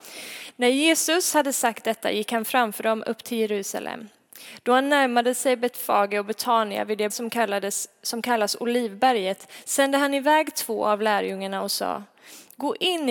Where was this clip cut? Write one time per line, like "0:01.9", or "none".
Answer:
0:07.1